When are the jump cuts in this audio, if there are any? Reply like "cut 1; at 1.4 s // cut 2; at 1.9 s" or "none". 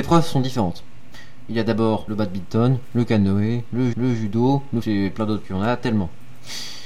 cut 1; at 2.1 s // cut 2; at 3.9 s // cut 3; at 4.8 s // cut 4; at 5.4 s

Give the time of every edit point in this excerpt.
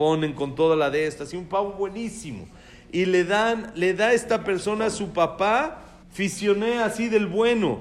cut 1; at 6.0 s

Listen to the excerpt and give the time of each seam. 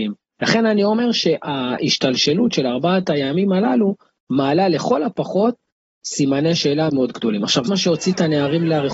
cut 1; at 6.9 s // cut 2; at 7.7 s

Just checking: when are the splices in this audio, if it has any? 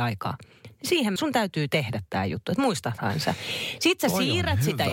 cut 1; at 1.2 s

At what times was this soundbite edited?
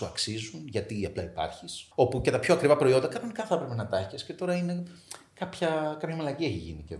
cut 1; at 1.9 s

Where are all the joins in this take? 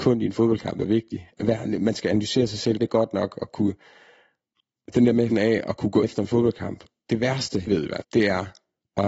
cut 1; at 2.8 s // cut 2; at 5.3 s // cut 3; at 6.0 s // cut 4; at 7.7 s // cut 5; at 8.0 s

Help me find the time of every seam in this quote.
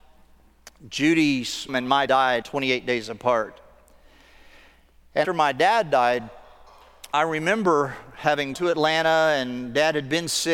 cut 1; at 1.7 s // cut 2; at 2.1 s // cut 3; at 2.4 s // cut 4; at 5.2 s // cut 5; at 7.1 s // cut 6; at 8.5 s

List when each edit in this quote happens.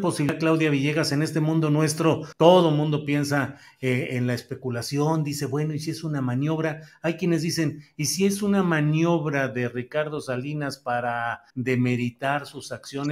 cut 1; at 2.3 s // cut 2; at 11.5 s

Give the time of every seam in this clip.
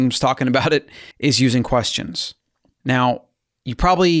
cut 1; at 1.1 s

